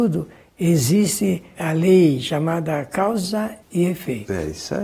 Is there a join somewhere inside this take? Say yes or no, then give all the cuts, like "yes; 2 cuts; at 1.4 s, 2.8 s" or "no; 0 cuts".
yes; 2 cuts; at 1.6 s, 3.6 s